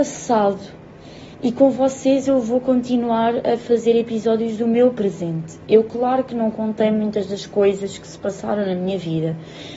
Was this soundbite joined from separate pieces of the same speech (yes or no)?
yes